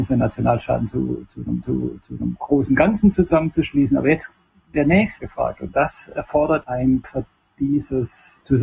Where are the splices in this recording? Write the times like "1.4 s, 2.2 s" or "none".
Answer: 1.6 s, 4.7 s, 5.2 s, 6.6 s, 7.0 s